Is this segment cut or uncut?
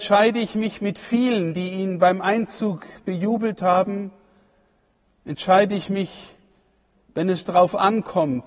uncut